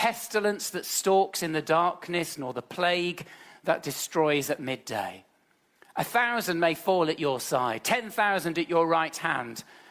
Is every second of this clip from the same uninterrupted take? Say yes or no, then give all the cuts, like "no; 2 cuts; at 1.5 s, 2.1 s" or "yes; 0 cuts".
yes; 0 cuts